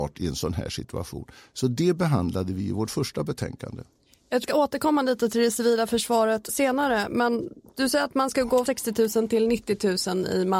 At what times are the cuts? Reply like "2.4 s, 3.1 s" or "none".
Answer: 4.4 s, 6.5 s, 8.7 s